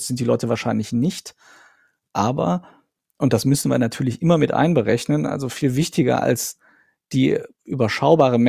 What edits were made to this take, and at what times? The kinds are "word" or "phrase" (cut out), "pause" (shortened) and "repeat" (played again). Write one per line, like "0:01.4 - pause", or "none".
none